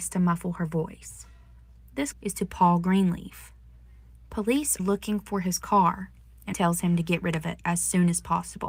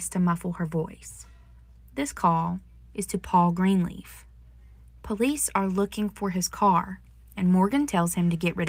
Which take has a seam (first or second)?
first